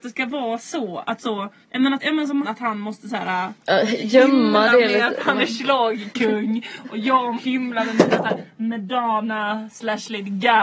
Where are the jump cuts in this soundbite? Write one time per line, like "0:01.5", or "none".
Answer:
0:01.2
0:01.6
0:02.0
0:02.4
0:03.6
0:07.4